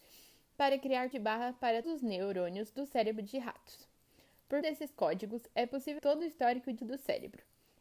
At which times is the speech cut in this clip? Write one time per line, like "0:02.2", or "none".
0:01.1
0:01.8
0:04.6
0:06.0
0:06.8